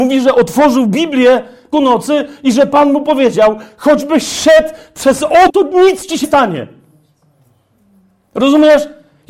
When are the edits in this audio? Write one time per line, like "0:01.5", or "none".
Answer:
0:01.7
0:05.5
0:06.2